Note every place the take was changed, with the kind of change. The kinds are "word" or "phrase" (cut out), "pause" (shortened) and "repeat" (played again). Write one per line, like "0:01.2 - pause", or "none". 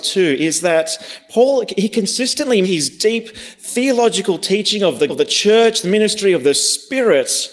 0:02.6 - word
0:05.1 - word